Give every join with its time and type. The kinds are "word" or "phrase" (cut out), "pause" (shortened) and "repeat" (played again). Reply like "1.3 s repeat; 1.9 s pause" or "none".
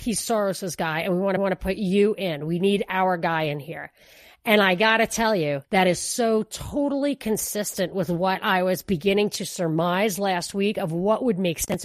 1.4 s repeat; 5.6 s pause